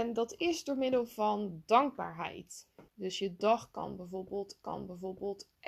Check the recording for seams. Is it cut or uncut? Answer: cut